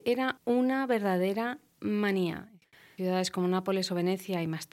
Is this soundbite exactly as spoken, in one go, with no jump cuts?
yes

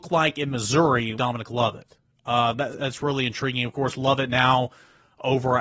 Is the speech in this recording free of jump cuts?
no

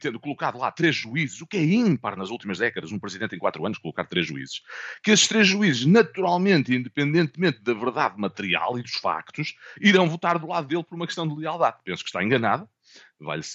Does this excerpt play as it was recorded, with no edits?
yes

